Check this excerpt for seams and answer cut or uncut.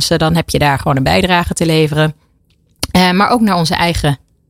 uncut